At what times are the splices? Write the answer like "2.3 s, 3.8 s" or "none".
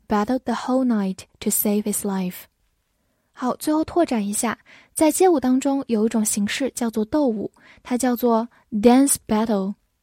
none